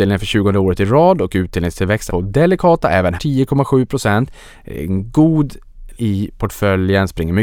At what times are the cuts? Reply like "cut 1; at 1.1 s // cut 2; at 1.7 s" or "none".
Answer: cut 1; at 2.1 s // cut 2; at 3.2 s // cut 3; at 5.9 s